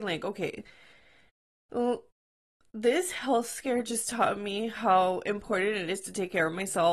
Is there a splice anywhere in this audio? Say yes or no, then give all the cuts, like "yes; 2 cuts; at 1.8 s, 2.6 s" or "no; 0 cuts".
no; 0 cuts